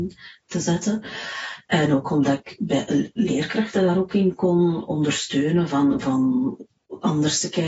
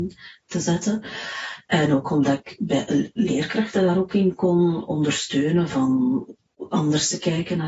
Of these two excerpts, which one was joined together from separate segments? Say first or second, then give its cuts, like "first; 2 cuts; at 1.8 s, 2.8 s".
second; 1 cut; at 5.7 s